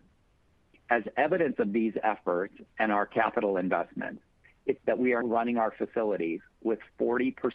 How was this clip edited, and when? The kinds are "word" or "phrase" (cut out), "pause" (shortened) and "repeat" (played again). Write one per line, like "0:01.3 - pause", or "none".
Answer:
0:04.8 - phrase
0:05.2 - word